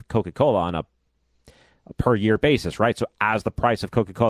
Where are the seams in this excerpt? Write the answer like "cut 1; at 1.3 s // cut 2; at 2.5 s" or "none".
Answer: none